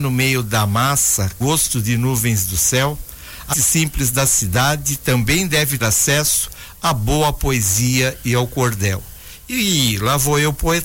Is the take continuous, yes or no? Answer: no